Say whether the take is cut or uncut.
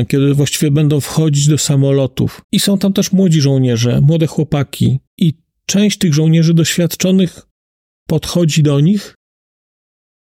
cut